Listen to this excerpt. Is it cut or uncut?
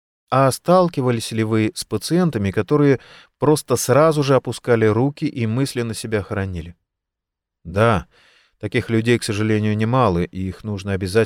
uncut